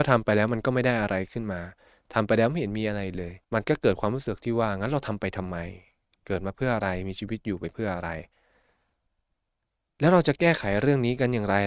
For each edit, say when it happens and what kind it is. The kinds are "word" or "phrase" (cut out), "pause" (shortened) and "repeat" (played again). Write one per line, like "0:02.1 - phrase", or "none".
0:03.4 - pause